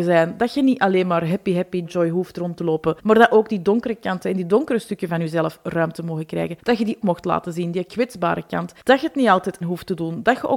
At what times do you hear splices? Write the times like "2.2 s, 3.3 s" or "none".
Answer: 1.9 s, 3.0 s, 6.6 s, 7.0 s, 8.8 s, 9.6 s